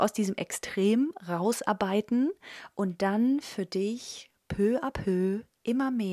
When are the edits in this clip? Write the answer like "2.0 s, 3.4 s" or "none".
none